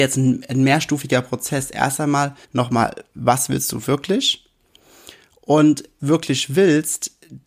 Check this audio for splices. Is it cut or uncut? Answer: cut